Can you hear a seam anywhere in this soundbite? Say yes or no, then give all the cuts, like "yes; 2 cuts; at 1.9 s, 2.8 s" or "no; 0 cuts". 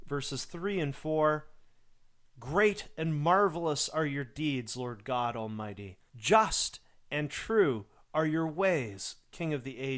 yes; 1 cut; at 6.1 s